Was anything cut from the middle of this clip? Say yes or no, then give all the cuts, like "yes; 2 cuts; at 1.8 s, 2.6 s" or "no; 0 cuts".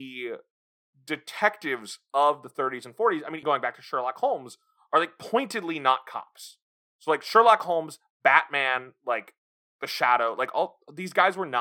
yes; 1 cut; at 3.4 s